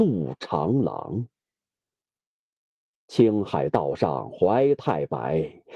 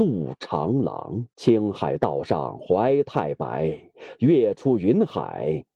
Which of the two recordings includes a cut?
second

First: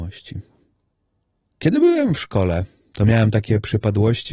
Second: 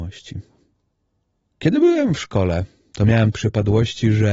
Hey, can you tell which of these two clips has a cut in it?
second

